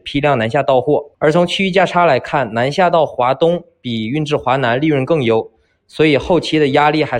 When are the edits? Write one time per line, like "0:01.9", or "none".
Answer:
0:01.1